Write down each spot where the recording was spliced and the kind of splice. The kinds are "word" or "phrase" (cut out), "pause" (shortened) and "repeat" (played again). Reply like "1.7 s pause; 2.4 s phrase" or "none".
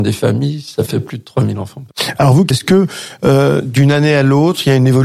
2.5 s phrase